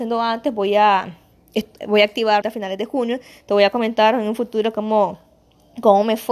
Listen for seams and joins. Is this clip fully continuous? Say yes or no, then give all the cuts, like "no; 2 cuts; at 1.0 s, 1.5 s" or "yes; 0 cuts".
no; 1 cut; at 2.4 s